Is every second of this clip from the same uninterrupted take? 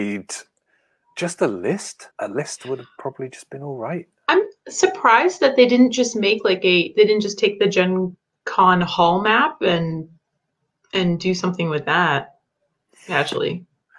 no; 1 cut; at 2.1 s

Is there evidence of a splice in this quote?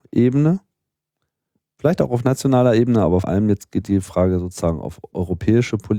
yes; 1 cut; at 3.2 s

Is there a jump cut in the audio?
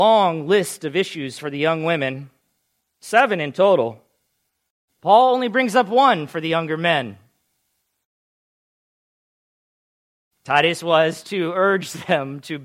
no; 0 cuts

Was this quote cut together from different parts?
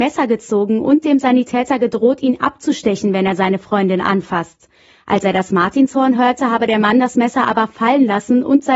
no; 0 cuts

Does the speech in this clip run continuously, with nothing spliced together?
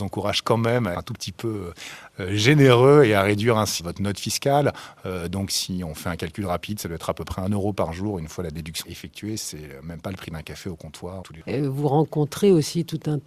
no; 4 cuts; at 0.9 s, 3.8 s, 8.8 s, 11.2 s

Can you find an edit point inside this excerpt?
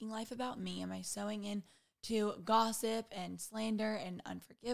no; 0 cuts

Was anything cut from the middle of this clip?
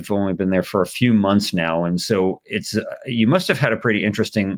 no; 0 cuts

